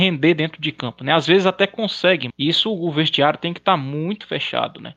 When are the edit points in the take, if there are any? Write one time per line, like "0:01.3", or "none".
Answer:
0:02.3